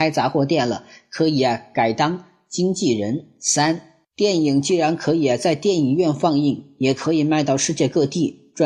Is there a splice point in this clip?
yes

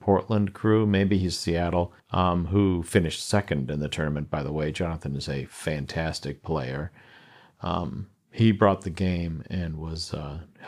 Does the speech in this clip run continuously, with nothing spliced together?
no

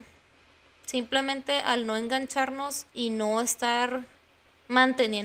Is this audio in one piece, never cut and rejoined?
no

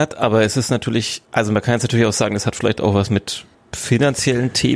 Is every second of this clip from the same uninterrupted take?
no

